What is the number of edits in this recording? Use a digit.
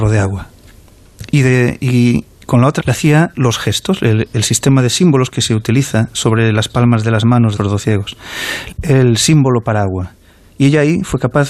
4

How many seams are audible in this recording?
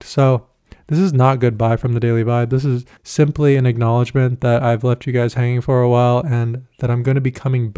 1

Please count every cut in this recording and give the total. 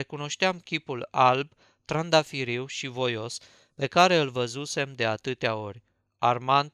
0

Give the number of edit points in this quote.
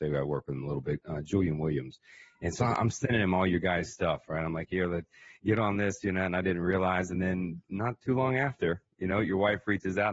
0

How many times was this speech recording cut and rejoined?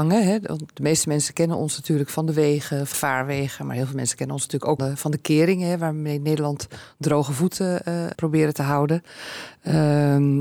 3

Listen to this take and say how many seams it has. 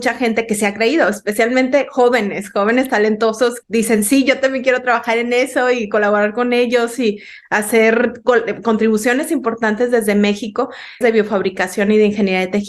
2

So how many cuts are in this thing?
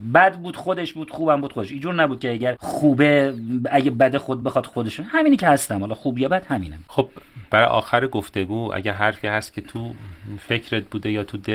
0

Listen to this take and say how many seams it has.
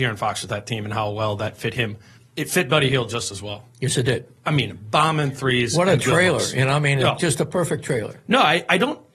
1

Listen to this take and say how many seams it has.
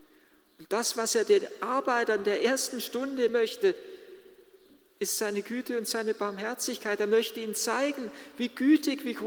1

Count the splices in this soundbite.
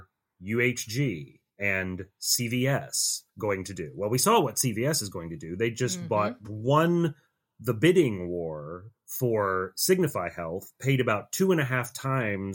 4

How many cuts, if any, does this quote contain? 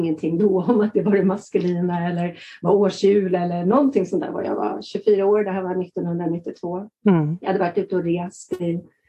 1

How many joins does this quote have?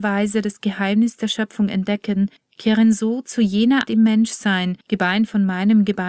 3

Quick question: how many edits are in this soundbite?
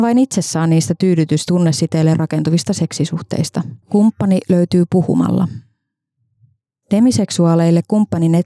2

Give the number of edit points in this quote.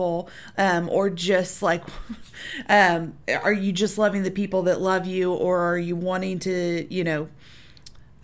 0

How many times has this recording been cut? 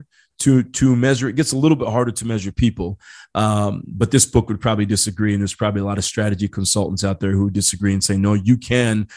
0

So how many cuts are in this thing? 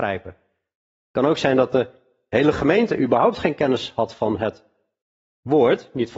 0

